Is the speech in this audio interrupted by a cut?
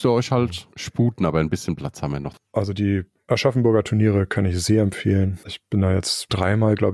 no; 0 cuts

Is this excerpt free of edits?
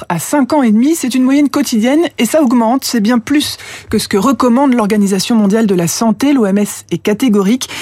yes; 0 cuts

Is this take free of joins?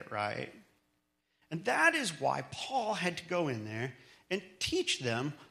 yes; 0 cuts

